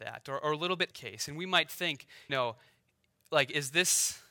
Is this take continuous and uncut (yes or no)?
no